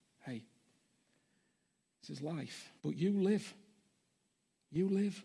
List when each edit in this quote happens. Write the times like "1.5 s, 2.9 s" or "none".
2.8 s